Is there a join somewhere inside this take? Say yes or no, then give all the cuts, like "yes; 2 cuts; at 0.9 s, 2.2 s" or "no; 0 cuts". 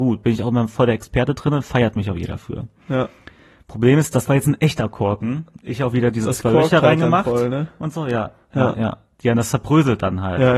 no; 0 cuts